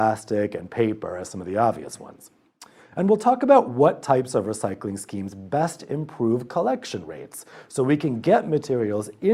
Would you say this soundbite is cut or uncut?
uncut